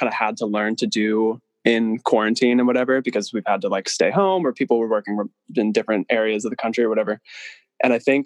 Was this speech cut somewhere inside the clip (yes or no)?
no